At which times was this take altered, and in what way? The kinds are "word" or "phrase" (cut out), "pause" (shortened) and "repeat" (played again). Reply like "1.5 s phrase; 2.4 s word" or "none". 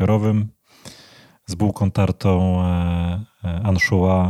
none